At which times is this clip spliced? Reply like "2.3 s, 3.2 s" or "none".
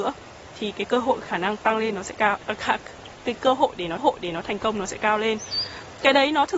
4.0 s